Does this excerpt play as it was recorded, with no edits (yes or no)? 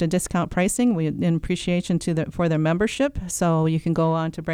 yes